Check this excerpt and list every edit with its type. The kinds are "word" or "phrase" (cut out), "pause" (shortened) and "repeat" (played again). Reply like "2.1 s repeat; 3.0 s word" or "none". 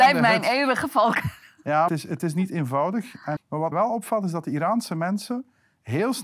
1.9 s phrase; 3.4 s word; 3.7 s word